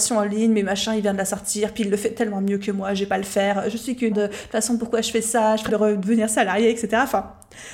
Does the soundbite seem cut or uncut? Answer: cut